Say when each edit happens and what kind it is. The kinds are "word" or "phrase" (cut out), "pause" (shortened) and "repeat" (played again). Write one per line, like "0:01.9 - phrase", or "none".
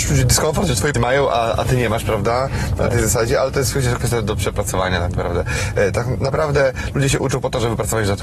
0:00.9 - word

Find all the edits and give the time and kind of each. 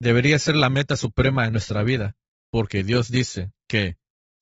none

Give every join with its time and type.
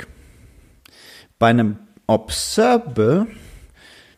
none

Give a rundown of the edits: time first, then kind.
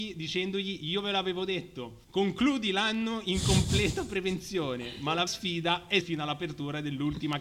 0:02.0 - pause
0:05.3 - word
0:06.0 - word

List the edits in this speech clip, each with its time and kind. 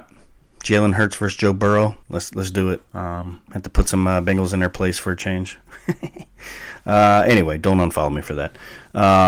0:02.0 - pause
0:02.9 - pause

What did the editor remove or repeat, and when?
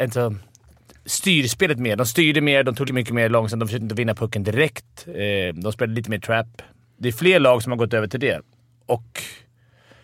0:02.9 - word

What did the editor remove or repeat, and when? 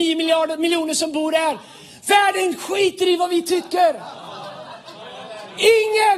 none

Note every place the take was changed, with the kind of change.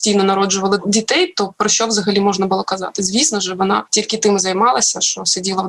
none

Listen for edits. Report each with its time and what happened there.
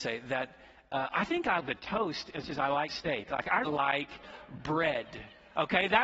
0:01.6 - word
0:02.4 - word
0:02.9 - word
0:03.6 - word

